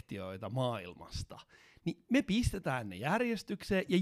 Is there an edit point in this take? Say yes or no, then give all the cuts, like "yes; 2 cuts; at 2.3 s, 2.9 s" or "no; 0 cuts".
no; 0 cuts